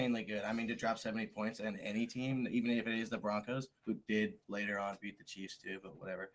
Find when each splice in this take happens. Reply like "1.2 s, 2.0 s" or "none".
3.8 s, 4.4 s